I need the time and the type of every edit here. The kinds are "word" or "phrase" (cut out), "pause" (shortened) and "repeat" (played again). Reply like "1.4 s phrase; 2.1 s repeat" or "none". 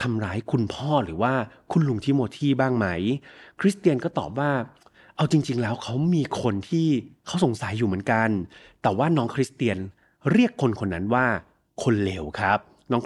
none